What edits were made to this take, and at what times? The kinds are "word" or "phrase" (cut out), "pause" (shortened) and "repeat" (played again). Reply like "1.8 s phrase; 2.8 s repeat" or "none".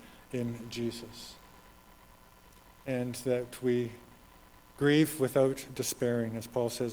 none